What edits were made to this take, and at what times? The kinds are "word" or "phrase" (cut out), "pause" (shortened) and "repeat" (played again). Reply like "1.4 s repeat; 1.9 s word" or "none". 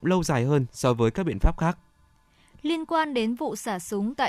none